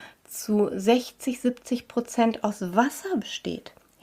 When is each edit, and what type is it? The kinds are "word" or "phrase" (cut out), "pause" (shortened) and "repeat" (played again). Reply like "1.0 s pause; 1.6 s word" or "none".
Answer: none